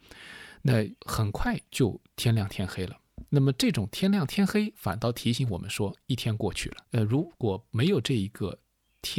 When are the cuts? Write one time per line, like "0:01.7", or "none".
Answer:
0:01.0
0:01.7
0:06.8